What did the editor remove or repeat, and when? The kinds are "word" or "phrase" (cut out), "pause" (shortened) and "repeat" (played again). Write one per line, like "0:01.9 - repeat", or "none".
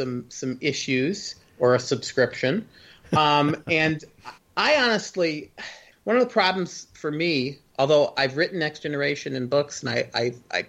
0:04.4 - word
0:05.9 - phrase